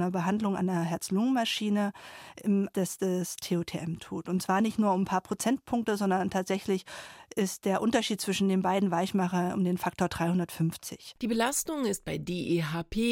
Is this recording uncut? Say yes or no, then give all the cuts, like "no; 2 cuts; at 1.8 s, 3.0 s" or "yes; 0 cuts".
no; 1 cut; at 2.7 s